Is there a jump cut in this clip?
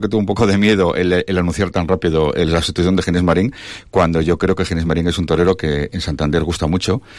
no; 0 cuts

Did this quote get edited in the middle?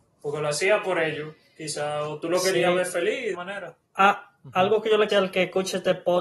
yes; 3 cuts; at 3.3 s, 3.8 s, 5.1 s

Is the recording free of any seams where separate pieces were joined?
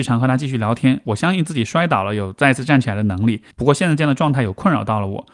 no; 1 cut; at 3.5 s

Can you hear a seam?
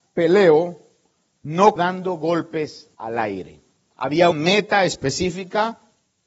yes; 3 cuts; at 1.8 s, 2.9 s, 4.3 s

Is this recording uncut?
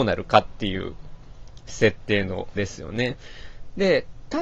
no; 1 cut; at 2.6 s

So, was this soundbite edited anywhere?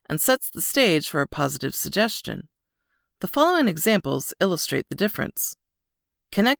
no; 0 cuts

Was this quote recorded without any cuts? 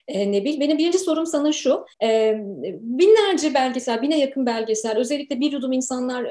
no; 1 cut; at 1.9 s

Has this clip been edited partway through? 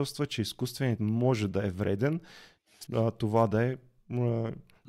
yes; 2 cuts; at 1.0 s, 2.9 s

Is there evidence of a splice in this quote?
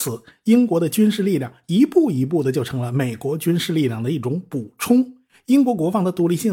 no; 0 cuts

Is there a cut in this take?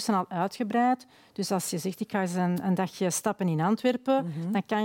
no; 0 cuts

